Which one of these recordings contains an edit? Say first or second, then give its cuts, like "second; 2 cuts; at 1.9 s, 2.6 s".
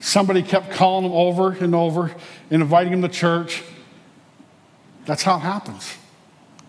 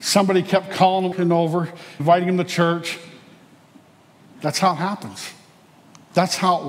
second; 2 cuts; at 1.1 s, 2.0 s